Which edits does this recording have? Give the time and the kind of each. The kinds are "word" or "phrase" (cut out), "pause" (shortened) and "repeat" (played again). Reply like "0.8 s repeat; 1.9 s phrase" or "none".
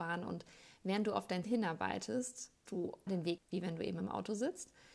1.4 s word; 2.7 s word; 3.1 s word; 3.4 s word

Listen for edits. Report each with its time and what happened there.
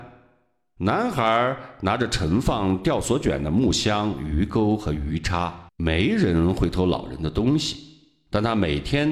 5.7 s pause

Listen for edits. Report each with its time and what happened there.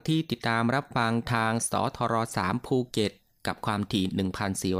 none

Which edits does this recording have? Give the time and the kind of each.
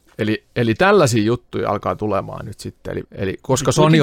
3.0 s word

